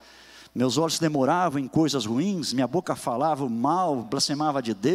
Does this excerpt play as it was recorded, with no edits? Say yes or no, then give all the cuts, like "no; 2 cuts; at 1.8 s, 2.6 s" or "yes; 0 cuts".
yes; 0 cuts